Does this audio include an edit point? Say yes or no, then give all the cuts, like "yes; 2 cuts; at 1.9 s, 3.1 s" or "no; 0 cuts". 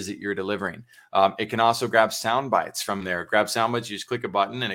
no; 0 cuts